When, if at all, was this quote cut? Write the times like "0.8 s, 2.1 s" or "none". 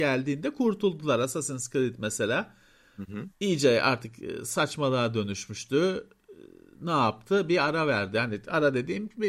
none